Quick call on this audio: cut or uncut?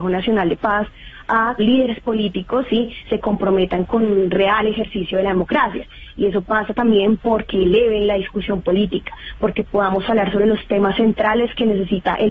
cut